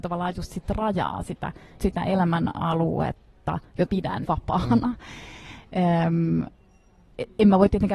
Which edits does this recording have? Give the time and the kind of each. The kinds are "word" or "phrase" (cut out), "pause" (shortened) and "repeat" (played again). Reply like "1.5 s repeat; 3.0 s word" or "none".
1.8 s word; 3.9 s word; 4.2 s word